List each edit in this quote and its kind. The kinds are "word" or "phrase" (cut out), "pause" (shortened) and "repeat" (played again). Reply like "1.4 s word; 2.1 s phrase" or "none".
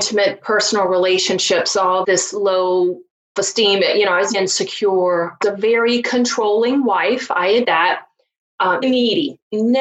2.0 s word; 3.4 s word; 4.3 s word; 5.4 s word; 7.6 s word; 8.8 s word